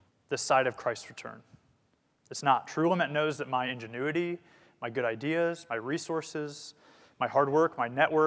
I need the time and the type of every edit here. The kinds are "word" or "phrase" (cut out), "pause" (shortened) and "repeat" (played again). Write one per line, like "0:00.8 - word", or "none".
none